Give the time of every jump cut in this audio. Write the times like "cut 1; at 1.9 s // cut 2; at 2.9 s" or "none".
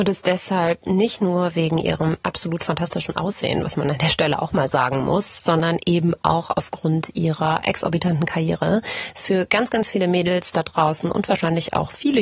none

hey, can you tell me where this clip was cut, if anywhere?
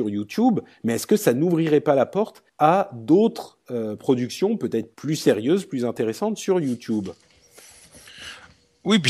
cut 1; at 2.5 s // cut 2; at 4.9 s

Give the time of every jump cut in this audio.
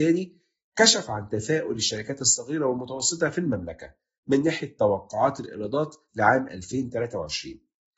none

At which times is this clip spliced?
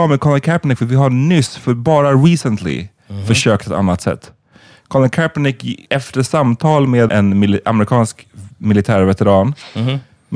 cut 1; at 5.9 s // cut 2; at 7.1 s

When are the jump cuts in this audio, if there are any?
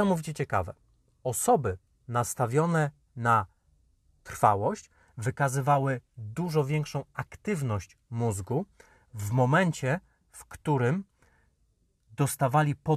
none

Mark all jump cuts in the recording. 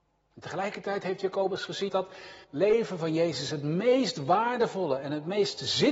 cut 1; at 1.9 s // cut 2; at 2.4 s

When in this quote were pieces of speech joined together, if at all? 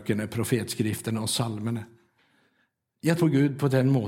cut 1; at 3.2 s

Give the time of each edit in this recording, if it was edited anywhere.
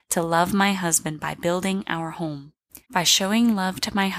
cut 1; at 2.8 s

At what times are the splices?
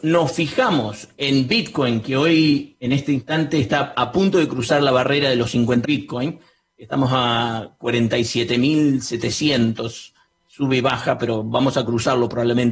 cut 1; at 5.8 s

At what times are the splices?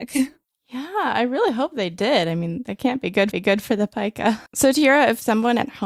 cut 1; at 3.3 s // cut 2; at 4.5 s

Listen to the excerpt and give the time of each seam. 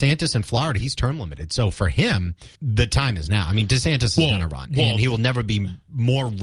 cut 1; at 2.5 s

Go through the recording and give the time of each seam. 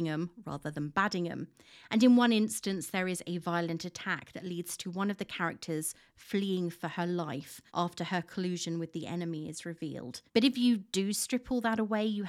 cut 1; at 7.7 s // cut 2; at 10.3 s

